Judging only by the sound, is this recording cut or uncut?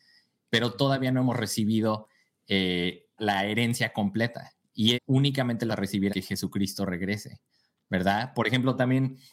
cut